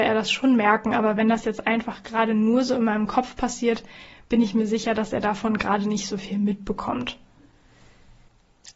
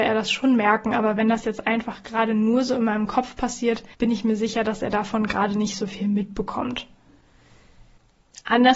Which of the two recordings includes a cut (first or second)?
second